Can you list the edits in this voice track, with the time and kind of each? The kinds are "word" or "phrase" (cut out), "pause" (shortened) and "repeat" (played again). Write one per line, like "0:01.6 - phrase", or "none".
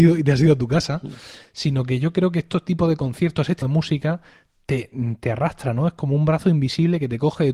0:03.6 - word